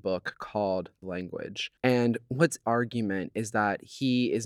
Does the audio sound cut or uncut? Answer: cut